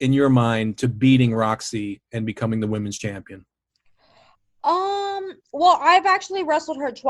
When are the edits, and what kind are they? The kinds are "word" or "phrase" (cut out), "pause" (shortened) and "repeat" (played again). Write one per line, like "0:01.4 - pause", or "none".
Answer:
none